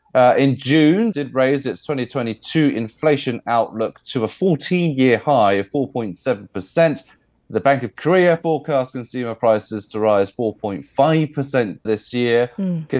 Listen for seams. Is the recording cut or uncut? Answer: cut